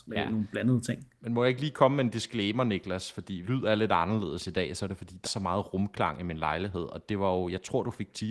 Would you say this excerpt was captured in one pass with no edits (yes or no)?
no